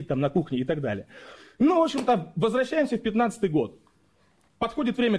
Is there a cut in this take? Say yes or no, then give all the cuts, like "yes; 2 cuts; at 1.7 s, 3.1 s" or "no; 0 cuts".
no; 0 cuts